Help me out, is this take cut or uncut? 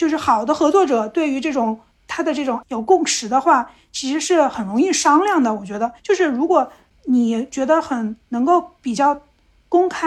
cut